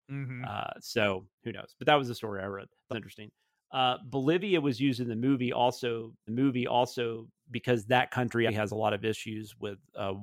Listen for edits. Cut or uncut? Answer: cut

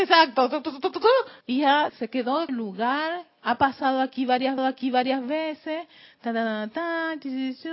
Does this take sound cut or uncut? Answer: cut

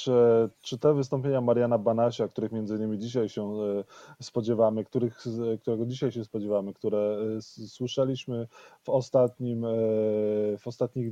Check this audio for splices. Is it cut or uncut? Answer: uncut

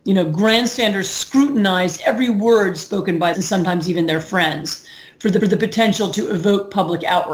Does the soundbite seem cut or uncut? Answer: cut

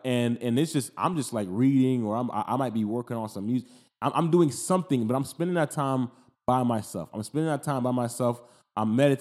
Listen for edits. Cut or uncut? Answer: uncut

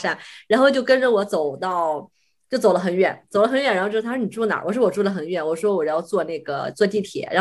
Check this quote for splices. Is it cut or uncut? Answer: uncut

